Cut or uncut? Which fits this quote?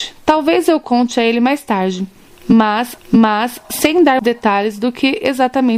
cut